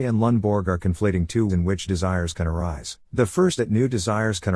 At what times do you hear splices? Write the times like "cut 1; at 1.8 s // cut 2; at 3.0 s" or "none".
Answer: cut 1; at 1.5 s // cut 2; at 1.9 s // cut 3; at 3.0 s // cut 4; at 3.6 s